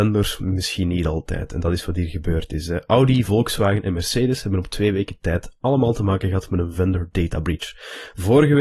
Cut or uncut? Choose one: uncut